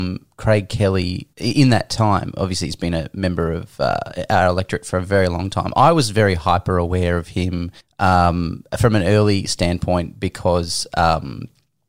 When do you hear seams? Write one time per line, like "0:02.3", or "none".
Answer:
0:01.3
0:07.8